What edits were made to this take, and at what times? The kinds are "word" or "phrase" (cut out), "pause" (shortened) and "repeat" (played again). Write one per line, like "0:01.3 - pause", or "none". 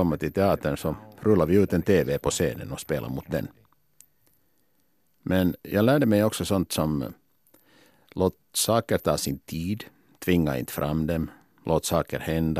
none